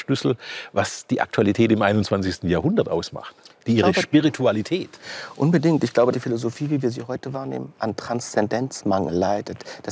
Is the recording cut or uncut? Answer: cut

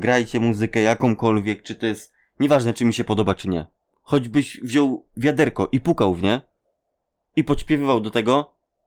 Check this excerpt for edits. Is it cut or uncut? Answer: uncut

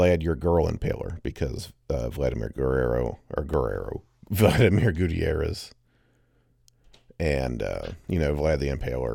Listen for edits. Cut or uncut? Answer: uncut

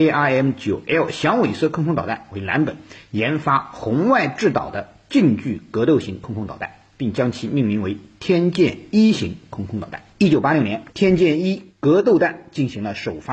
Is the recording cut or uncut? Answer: cut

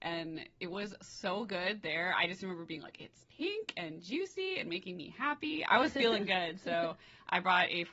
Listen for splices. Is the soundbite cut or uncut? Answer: uncut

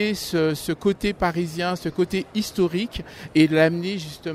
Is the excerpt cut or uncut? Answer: uncut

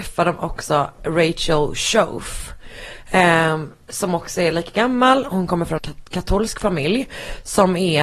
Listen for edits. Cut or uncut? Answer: cut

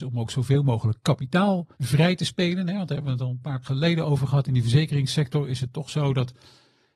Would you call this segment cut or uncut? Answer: cut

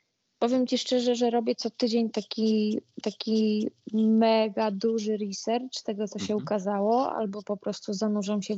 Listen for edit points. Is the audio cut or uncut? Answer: cut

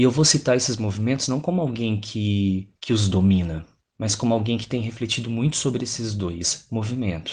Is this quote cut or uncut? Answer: cut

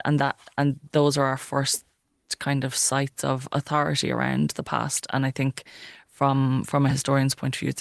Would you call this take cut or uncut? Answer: uncut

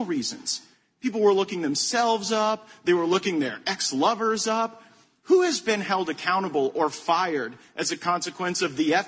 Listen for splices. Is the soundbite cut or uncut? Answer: uncut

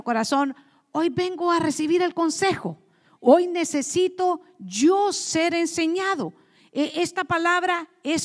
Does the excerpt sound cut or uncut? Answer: uncut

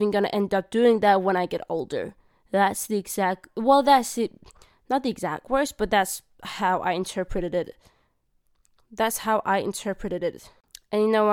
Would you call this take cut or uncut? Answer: uncut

